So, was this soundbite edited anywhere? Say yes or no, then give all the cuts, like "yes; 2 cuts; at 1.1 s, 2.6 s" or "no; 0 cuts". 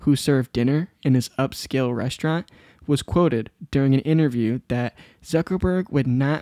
no; 0 cuts